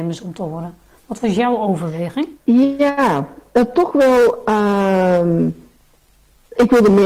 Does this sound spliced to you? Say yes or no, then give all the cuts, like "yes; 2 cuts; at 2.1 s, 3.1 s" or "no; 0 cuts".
yes; 1 cut; at 2.4 s